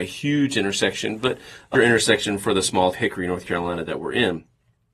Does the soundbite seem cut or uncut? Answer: cut